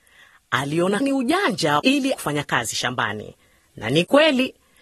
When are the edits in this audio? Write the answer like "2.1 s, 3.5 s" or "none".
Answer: 1.0 s, 1.8 s, 2.1 s